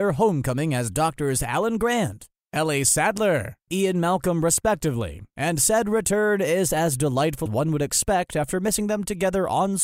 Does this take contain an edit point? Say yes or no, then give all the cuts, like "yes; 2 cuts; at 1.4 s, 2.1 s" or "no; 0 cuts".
yes; 2 cuts; at 3.7 s, 7.5 s